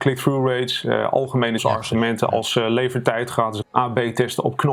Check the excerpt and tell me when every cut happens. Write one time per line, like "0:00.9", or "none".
0:01.6
0:03.6